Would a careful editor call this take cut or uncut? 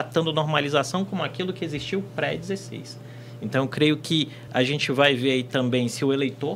uncut